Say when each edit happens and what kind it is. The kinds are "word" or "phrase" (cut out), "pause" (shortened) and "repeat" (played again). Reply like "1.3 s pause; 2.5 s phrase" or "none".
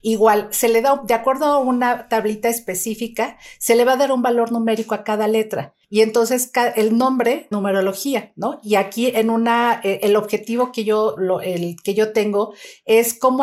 5.8 s pause; 7.5 s phrase; 11.2 s word